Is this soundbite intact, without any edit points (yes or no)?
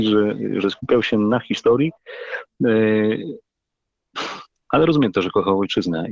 yes